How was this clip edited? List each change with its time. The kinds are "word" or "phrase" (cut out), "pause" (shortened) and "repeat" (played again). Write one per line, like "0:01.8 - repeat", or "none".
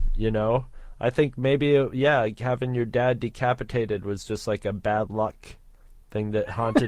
none